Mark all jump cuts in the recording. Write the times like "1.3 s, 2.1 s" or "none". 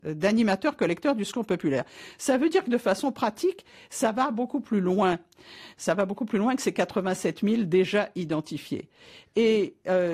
none